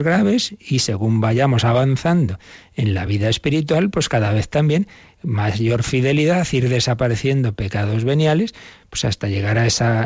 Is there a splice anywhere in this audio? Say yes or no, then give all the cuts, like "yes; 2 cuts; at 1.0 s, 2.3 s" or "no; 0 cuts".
no; 0 cuts